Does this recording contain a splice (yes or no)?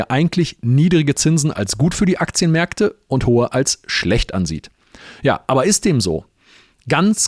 no